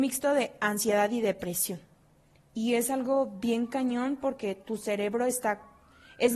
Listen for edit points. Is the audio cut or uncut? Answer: uncut